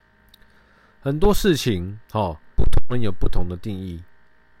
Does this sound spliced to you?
yes; 2 cuts; at 2.0 s, 2.5 s

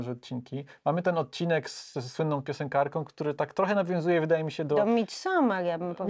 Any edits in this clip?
no; 0 cuts

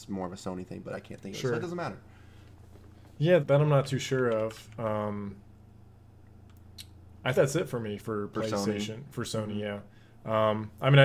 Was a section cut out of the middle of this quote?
yes; 3 cuts; at 3.4 s, 7.3 s, 8.0 s

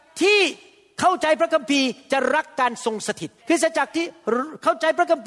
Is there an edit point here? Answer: yes; 1 cut; at 3.4 s

